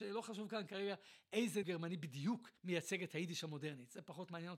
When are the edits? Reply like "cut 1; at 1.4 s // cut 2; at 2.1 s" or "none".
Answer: cut 1; at 1.6 s // cut 2; at 2.6 s